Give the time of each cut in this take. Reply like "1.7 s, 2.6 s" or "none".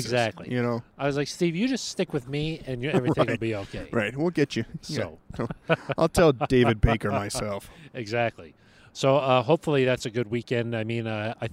none